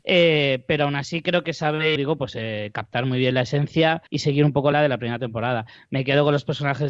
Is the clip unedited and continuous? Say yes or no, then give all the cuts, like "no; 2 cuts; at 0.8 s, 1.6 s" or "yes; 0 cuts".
no; 3 cuts; at 2.0 s, 4.1 s, 4.7 s